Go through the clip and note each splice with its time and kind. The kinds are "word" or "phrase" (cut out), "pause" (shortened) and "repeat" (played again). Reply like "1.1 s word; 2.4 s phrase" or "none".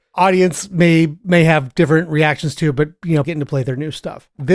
3.2 s phrase